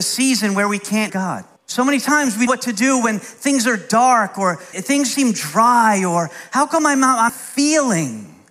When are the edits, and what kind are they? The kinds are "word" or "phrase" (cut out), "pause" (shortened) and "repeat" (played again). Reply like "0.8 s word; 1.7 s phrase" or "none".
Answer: 1.1 s word; 1.6 s pause; 2.5 s phrase; 4.7 s word; 5.1 s word; 7.3 s word

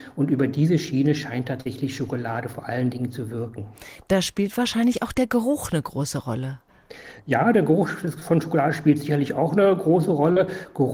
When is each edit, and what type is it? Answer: none

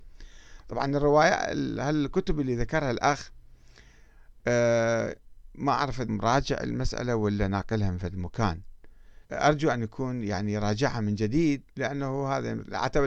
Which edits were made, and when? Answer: 6.1 s word; 9.3 s pause; 11.7 s pause

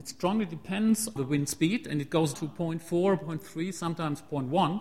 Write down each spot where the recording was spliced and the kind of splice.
1.2 s word; 2.3 s word

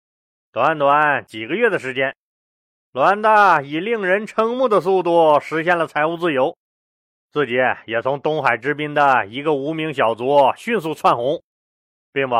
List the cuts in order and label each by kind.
none

